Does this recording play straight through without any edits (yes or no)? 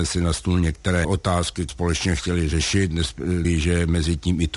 no